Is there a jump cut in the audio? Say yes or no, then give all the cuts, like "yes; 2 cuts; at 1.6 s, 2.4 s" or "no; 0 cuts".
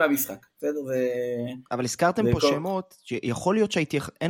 yes; 1 cut; at 1.7 s